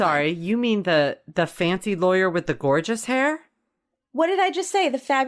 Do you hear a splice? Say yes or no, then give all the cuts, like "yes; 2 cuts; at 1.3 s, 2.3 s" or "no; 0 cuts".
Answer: no; 0 cuts